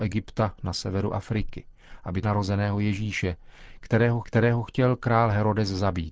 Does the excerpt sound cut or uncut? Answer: cut